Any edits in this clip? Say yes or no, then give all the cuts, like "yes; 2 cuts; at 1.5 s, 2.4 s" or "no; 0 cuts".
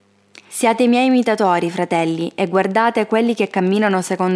no; 0 cuts